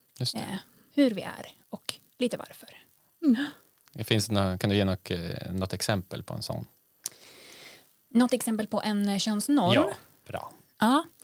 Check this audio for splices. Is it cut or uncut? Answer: uncut